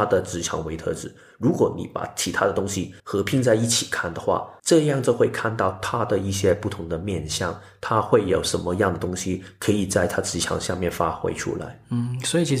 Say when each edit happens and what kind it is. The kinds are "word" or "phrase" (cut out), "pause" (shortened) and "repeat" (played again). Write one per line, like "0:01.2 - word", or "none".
0:03.0 - pause
0:04.6 - pause